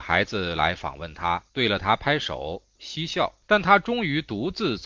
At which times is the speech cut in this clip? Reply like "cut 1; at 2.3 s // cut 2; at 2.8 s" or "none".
cut 1; at 1.5 s // cut 2; at 2.8 s // cut 3; at 3.4 s